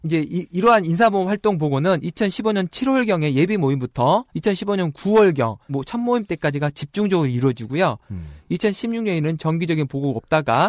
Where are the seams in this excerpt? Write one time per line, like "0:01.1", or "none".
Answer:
0:04.3
0:05.7